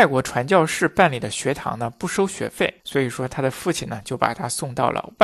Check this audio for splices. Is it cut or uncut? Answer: cut